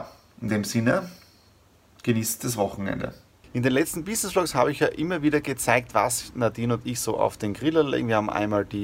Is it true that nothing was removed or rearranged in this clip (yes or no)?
yes